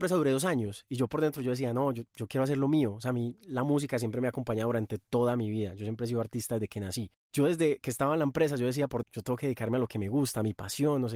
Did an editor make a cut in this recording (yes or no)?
yes